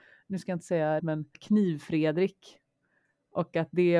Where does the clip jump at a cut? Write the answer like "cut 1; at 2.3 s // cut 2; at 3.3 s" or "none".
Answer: cut 1; at 1.0 s // cut 2; at 1.3 s